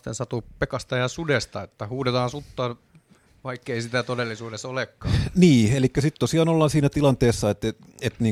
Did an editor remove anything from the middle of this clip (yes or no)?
no